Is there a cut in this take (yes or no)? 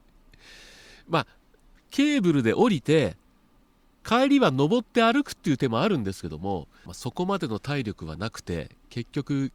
no